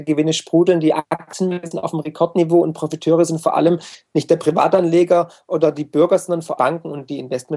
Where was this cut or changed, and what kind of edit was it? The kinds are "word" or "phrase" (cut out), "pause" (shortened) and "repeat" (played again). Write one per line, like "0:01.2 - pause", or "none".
0:06.6 - phrase